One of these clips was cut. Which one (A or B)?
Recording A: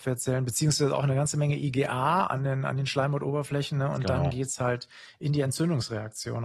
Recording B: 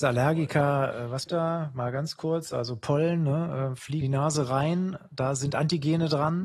B